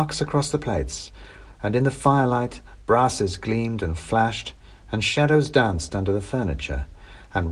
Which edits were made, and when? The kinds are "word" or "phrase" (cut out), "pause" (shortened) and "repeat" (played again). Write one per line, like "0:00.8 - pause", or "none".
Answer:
none